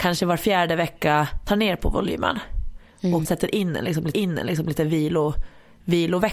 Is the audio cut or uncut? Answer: cut